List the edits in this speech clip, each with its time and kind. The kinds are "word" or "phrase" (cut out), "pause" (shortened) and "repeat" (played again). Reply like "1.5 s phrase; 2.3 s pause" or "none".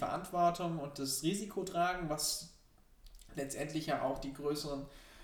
none

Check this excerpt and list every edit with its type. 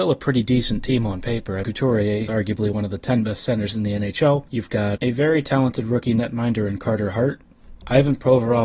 1.6 s phrase; 2.3 s word; 4.5 s pause; 5.0 s word

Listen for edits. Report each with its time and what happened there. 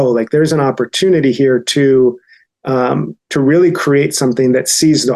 3.2 s pause

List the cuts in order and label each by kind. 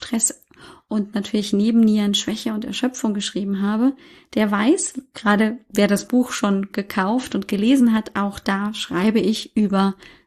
none

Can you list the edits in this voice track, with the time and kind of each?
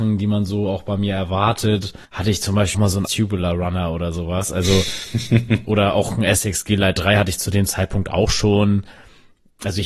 2.0 s pause; 2.7 s word; 3.0 s word

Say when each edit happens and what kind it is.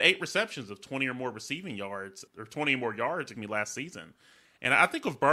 2.3 s word; 3.3 s word

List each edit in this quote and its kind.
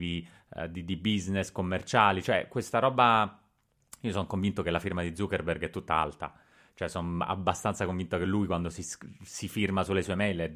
none

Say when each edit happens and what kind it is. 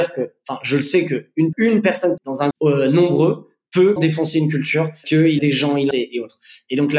1.5 s word; 2.2 s word; 2.5 s word; 4.0 s word; 5.0 s word; 5.4 s word; 5.9 s word

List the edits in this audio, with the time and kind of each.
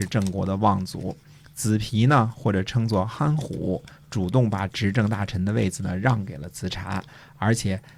none

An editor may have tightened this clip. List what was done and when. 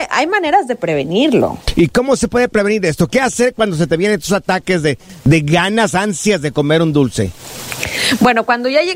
none

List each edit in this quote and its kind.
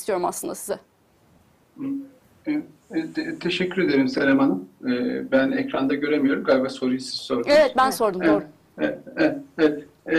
none

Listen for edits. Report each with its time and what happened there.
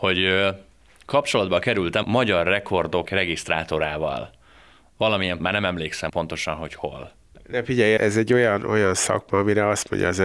2.0 s word; 3.1 s word; 5.4 s word; 6.1 s word; 8.0 s word

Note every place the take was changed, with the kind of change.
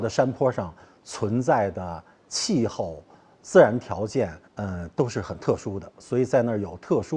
4.5 s pause

